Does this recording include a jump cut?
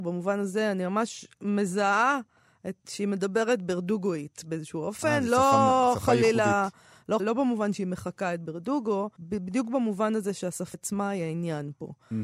yes; 3 cuts; at 7.2 s, 9.2 s, 10.7 s

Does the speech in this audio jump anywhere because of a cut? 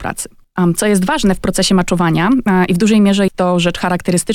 yes; 1 cut; at 3.3 s

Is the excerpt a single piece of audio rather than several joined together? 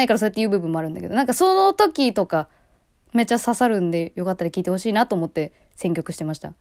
yes; 0 cuts

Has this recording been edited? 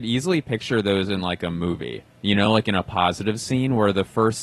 no; 0 cuts

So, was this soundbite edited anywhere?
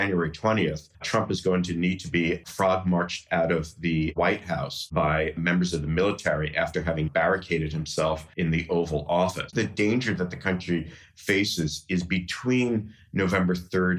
yes; 2 cuts; at 0.9 s, 9.5 s

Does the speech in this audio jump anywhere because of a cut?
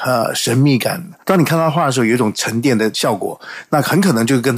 yes; 1 cut; at 1.2 s

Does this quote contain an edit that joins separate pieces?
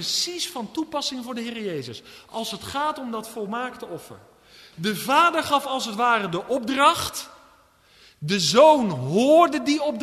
no; 0 cuts

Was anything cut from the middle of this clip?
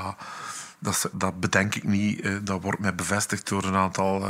yes; 1 cut; at 1.1 s

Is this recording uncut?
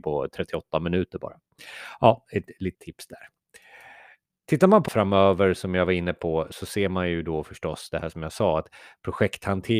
no; 2 cuts; at 2.7 s, 4.9 s

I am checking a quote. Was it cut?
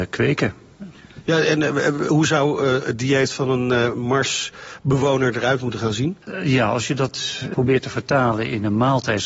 no; 0 cuts

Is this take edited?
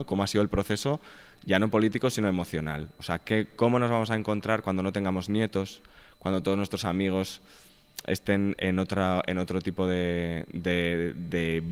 no; 0 cuts

